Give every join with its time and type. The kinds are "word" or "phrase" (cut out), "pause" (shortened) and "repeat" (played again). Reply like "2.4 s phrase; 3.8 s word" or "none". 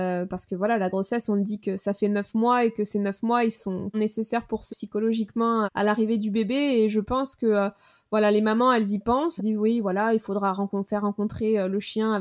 3.9 s word; 4.7 s word; 5.6 s word; 9.4 s word